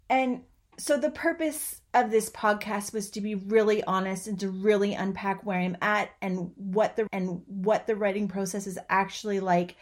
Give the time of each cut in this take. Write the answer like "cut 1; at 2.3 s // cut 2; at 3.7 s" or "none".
cut 1; at 7.1 s

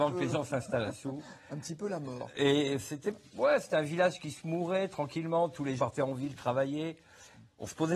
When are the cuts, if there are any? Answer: cut 1; at 5.8 s

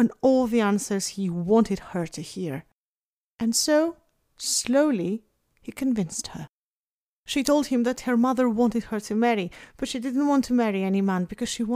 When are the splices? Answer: none

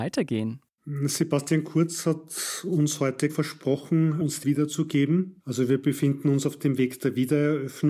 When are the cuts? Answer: cut 1; at 3.3 s // cut 2; at 4.4 s

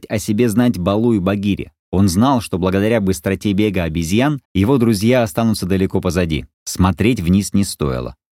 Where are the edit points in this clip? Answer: cut 1; at 1.8 s // cut 2; at 4.5 s // cut 3; at 6.5 s

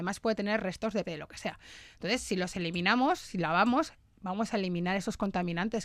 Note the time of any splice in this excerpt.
cut 1; at 1.0 s

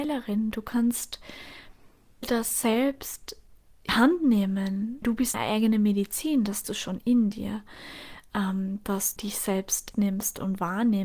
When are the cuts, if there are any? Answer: cut 1; at 2.2 s // cut 2; at 3.9 s // cut 3; at 5.0 s // cut 4; at 5.3 s // cut 5; at 6.6 s // cut 6; at 9.2 s // cut 7; at 9.9 s

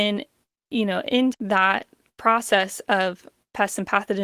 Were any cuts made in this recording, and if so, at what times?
cut 1; at 1.3 s

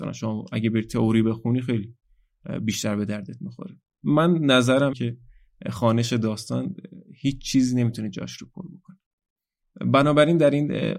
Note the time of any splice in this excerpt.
cut 1; at 4.9 s

